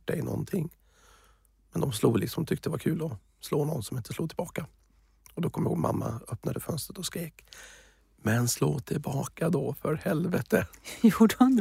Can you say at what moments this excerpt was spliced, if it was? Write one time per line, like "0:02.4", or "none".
none